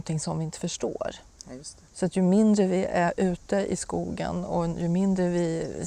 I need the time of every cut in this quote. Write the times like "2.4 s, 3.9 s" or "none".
1.9 s